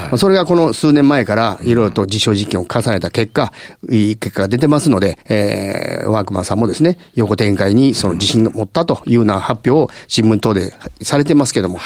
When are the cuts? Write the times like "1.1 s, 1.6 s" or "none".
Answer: 5.2 s